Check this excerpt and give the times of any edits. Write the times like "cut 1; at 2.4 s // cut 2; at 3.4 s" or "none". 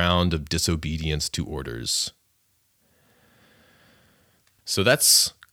none